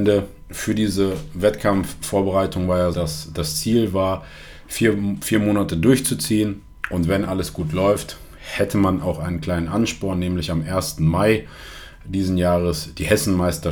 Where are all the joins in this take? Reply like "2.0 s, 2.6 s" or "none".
2.9 s